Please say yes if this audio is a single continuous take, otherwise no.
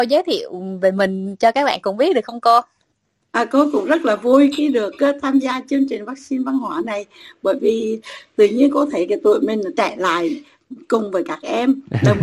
yes